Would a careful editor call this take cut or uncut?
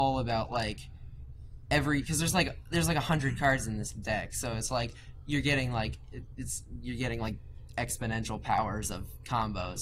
uncut